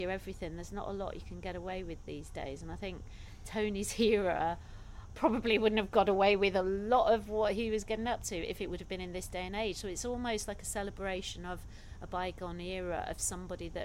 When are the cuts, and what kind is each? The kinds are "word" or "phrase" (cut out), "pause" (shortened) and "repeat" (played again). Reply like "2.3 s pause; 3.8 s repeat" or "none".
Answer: none